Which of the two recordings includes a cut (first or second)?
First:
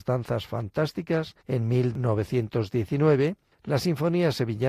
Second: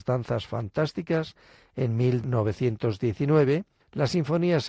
first